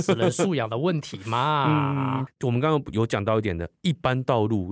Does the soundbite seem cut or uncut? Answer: cut